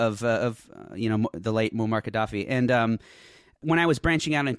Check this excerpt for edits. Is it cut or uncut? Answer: uncut